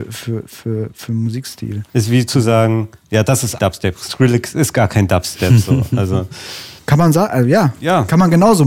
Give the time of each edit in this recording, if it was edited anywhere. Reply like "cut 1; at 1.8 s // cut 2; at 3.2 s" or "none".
cut 1; at 1.9 s // cut 2; at 3.6 s // cut 3; at 6.8 s

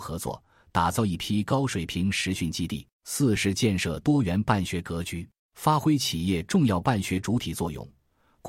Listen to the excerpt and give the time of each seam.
cut 1; at 2.9 s // cut 2; at 5.4 s

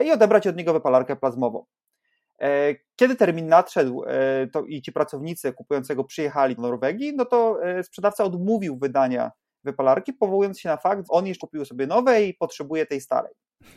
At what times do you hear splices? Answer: cut 1; at 6.6 s // cut 2; at 11.0 s // cut 3; at 11.4 s

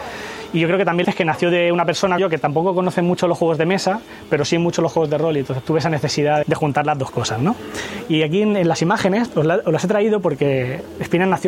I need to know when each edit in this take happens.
cut 1; at 1.0 s // cut 2; at 2.2 s // cut 3; at 5.7 s // cut 4; at 6.4 s // cut 5; at 9.3 s

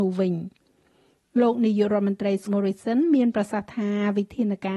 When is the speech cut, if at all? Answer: cut 1; at 2.5 s

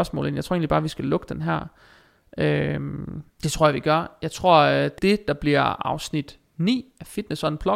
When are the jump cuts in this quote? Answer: cut 1; at 3.3 s // cut 2; at 5.0 s

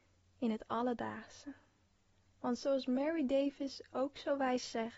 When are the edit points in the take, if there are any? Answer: cut 1; at 1.8 s

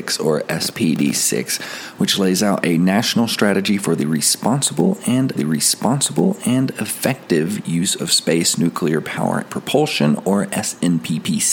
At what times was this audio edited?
cut 1; at 5.3 s // cut 2; at 9.5 s

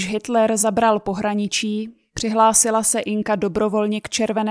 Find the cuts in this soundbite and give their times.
none

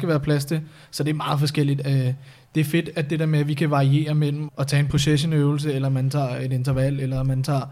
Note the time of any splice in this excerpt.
cut 1; at 4.5 s

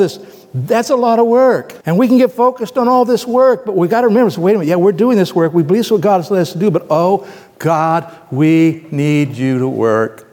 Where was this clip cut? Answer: cut 1; at 1.8 s

